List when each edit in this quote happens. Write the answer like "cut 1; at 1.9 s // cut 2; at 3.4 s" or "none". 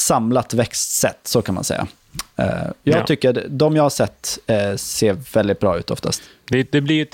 none